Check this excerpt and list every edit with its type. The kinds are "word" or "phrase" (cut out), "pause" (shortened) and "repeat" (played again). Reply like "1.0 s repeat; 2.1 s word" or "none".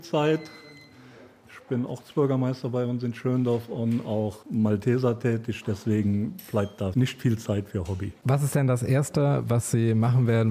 none